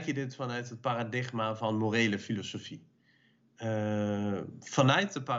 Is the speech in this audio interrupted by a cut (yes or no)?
no